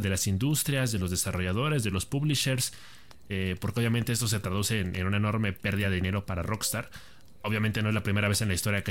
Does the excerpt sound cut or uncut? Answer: uncut